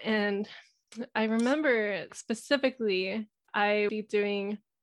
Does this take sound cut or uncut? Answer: cut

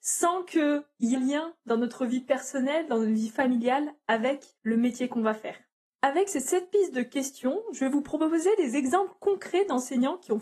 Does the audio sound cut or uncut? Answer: cut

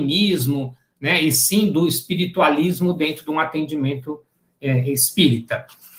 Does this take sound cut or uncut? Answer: uncut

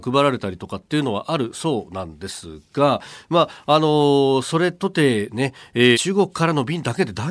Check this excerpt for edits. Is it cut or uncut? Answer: cut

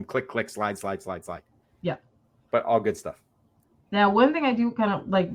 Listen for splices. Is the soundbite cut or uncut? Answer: uncut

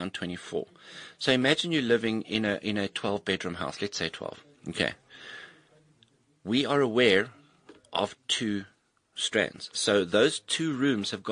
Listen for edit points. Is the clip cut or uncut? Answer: uncut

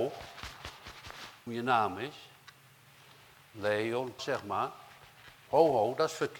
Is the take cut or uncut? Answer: cut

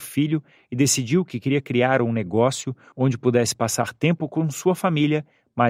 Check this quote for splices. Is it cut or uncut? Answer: uncut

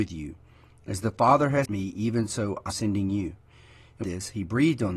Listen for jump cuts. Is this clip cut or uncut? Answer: cut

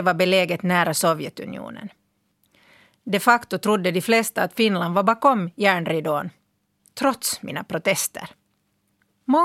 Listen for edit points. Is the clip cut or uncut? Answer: uncut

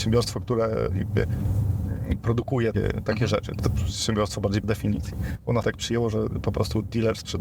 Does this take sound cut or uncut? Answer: cut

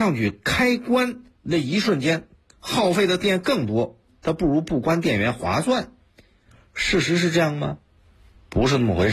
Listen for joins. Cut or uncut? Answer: uncut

